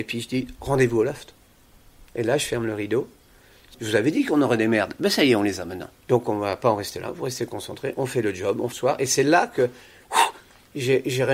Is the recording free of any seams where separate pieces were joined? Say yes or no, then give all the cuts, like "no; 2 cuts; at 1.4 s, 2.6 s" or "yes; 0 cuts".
no; 3 cuts; at 3.7 s, 6.0 s, 8.7 s